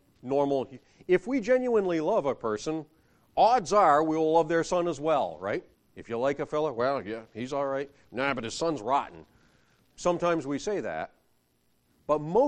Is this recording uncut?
no; 1 cut; at 5.7 s

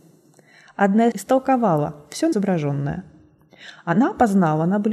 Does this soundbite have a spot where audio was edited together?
yes; 2 cuts; at 1.1 s, 2.3 s

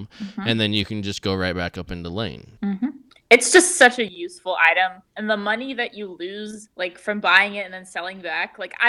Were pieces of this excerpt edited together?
yes; 3 cuts; at 2.6 s, 5.1 s, 6.7 s

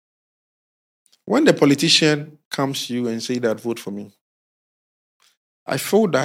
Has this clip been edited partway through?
no; 0 cuts

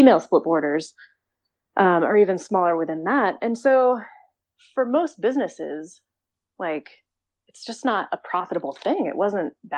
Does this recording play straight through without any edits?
yes; 0 cuts

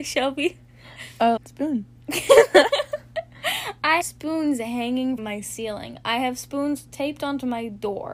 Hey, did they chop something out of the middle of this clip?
yes; 3 cuts; at 1.4 s, 4.0 s, 5.2 s

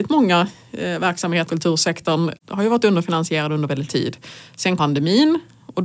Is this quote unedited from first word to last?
no; 4 cuts; at 1.5 s, 2.4 s, 3.9 s, 4.8 s

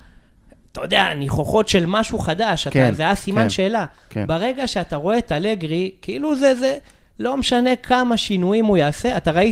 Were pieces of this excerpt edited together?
no; 0 cuts

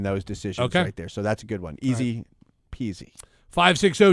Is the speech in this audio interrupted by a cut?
no; 0 cuts

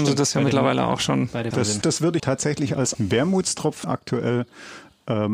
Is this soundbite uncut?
no; 5 cuts; at 1.5 s, 1.8 s, 2.2 s, 2.9 s, 3.8 s

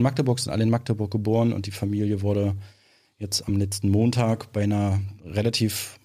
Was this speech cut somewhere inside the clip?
no; 0 cuts

